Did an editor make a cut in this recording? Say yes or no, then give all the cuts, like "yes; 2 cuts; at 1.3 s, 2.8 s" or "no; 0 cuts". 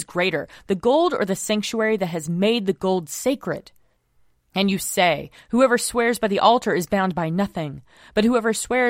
no; 0 cuts